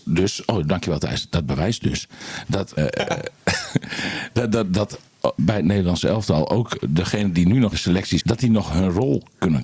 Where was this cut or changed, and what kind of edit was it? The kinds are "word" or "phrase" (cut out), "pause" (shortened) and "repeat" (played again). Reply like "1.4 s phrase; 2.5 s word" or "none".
2.8 s word; 5.4 s word; 7.7 s word; 8.2 s word